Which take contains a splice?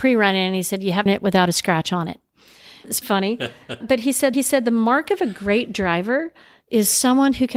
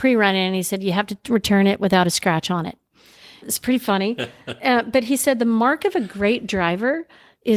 first; 4 cuts; at 1.1 s, 3.0 s, 3.8 s, 4.3 s

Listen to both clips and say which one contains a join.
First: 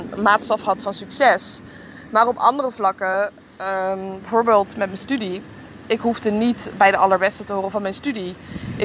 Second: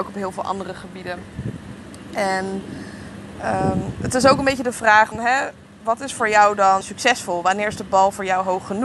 second; 2 cuts; at 5.1 s, 6.8 s

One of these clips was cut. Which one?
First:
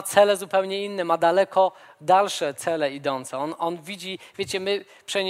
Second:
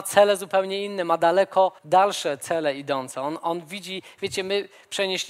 second; 1 cut; at 1.8 s

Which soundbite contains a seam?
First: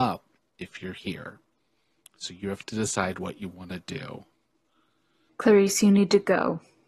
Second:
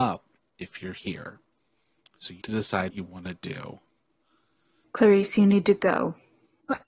second; 2 cuts; at 2.4 s, 2.9 s

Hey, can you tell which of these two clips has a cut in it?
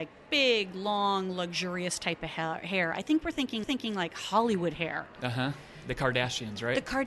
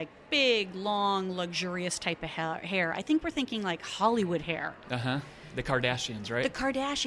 first; 1 cut; at 3.6 s

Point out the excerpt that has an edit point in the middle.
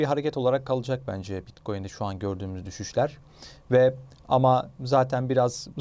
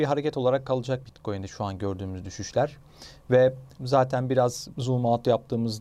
second; 2 cuts; at 1.0 s, 3.8 s

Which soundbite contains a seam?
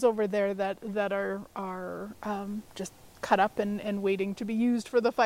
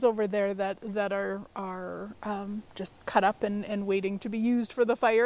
second; 1 cut; at 3.0 s

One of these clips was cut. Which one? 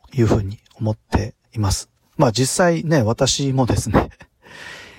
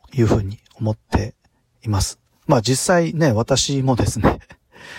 first; 1 cut; at 1.4 s

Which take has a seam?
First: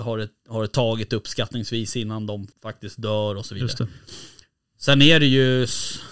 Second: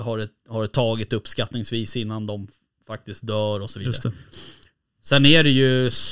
first; 1 cut; at 2.5 s

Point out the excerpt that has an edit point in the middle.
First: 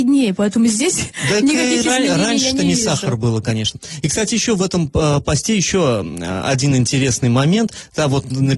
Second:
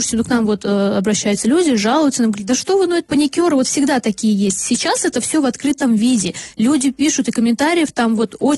second; 1 cut; at 3.1 s

